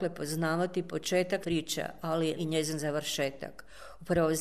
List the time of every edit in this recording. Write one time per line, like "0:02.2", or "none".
0:01.4
0:02.4